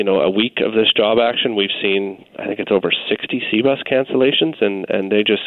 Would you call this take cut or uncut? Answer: uncut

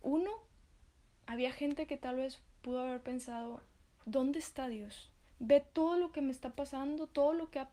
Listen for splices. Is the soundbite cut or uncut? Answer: cut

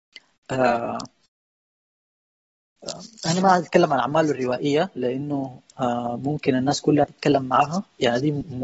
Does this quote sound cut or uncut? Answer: uncut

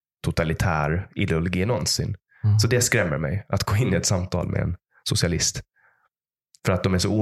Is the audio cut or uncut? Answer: uncut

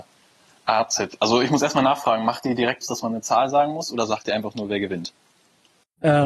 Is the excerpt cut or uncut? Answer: cut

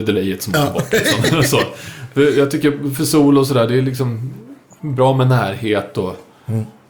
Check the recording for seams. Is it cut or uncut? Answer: uncut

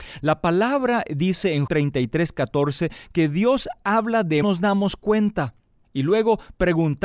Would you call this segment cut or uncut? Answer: cut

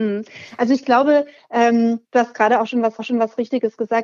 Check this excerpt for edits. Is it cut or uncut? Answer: cut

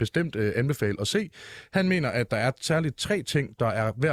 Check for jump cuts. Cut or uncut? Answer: uncut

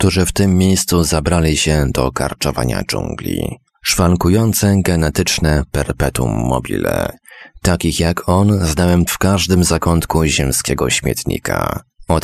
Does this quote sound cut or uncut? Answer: cut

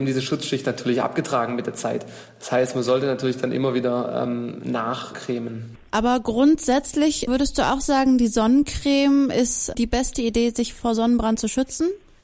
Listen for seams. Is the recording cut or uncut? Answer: uncut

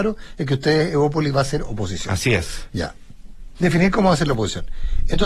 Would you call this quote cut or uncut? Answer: uncut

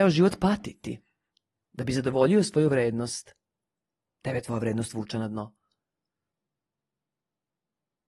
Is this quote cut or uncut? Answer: uncut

